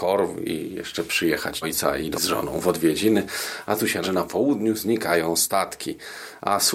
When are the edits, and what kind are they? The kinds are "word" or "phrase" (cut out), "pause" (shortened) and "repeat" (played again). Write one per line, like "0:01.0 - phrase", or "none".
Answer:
0:01.6 - word
0:02.1 - word
0:04.0 - phrase